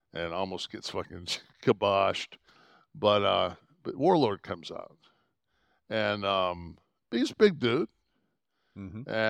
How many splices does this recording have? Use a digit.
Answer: 0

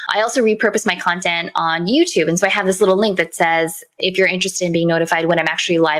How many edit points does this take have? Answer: 0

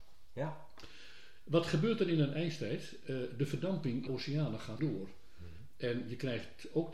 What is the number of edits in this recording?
2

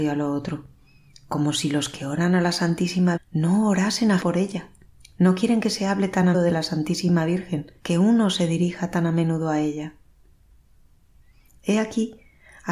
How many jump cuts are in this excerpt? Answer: 5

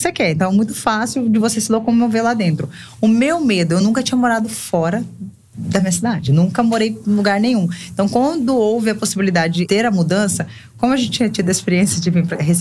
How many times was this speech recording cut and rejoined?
0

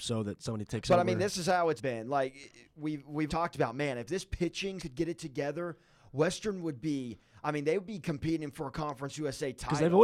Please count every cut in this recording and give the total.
3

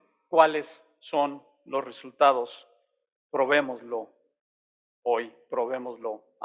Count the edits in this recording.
0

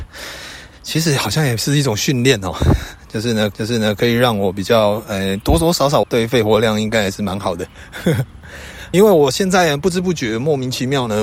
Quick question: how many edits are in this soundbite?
3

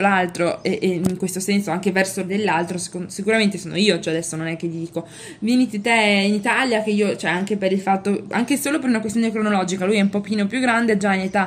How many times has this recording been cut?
1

